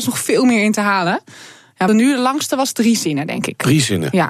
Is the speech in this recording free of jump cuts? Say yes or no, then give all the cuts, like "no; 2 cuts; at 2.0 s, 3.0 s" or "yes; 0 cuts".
no; 1 cut; at 1.9 s